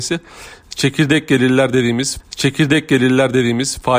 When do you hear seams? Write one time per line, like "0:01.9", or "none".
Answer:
0:02.2